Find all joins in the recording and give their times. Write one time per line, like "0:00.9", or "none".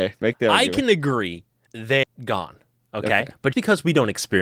0:01.7
0:02.0
0:03.5